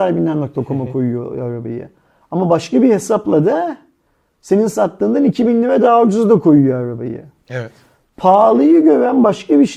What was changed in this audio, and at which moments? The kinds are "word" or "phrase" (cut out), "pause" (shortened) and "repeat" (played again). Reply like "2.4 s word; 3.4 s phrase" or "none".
none